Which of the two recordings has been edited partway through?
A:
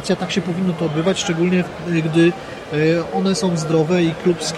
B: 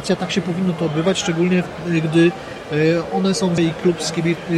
B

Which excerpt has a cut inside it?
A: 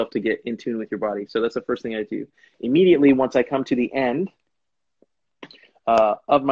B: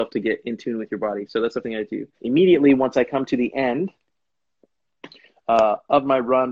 B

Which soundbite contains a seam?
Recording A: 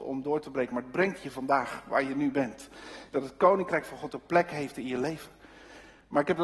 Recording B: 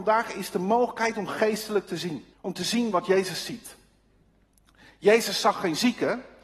B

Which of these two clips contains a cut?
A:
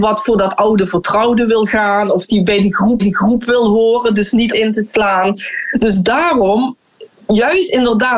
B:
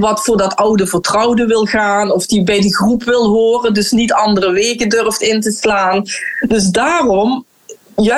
A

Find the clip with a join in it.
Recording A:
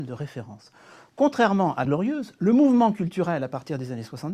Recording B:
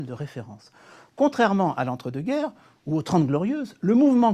A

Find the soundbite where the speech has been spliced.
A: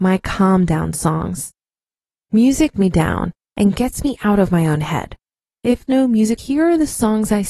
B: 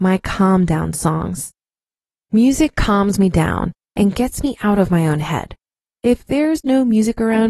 A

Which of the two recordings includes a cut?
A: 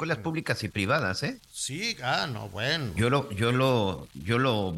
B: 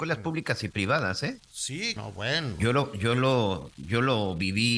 B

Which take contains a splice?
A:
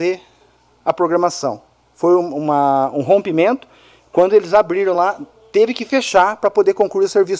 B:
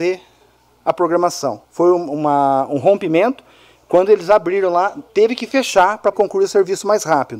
B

